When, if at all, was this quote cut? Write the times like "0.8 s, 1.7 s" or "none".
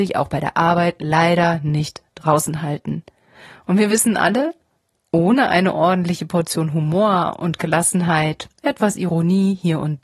none